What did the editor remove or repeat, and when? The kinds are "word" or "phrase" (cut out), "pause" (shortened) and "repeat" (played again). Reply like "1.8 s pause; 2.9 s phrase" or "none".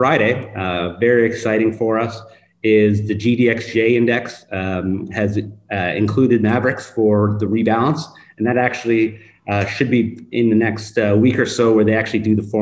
none